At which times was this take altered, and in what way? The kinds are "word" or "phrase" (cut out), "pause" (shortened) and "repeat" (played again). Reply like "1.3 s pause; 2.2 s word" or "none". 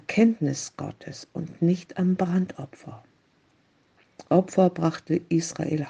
none